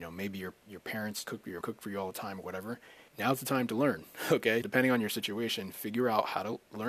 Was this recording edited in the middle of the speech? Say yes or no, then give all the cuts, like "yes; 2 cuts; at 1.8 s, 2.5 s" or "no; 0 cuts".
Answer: yes; 4 cuts; at 1.2 s, 1.6 s, 3.1 s, 4.6 s